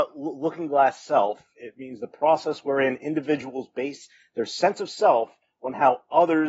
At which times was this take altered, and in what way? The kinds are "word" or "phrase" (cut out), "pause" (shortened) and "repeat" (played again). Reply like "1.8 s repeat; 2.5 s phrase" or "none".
none